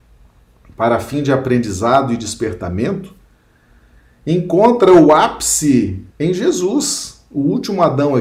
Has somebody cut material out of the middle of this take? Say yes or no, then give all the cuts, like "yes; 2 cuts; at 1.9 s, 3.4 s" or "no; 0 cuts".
yes; 1 cut; at 6.1 s